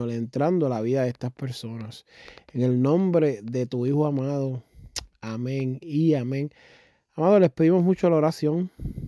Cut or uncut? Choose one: uncut